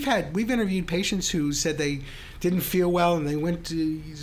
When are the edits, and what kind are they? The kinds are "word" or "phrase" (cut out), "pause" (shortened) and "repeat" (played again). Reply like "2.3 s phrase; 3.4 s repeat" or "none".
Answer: none